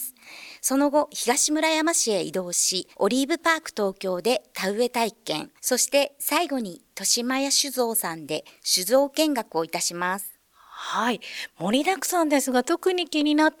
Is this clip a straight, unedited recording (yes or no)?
no